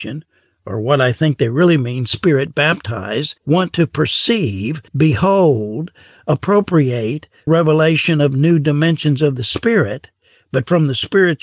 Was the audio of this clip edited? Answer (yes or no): yes